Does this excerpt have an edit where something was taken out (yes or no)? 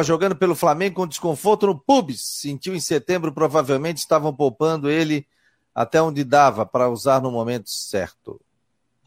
no